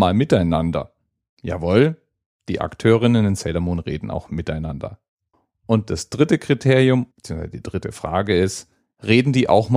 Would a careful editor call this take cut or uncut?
cut